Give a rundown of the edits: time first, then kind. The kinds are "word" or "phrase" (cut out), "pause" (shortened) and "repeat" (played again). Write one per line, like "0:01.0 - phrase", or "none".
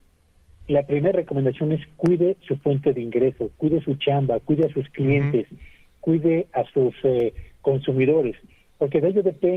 none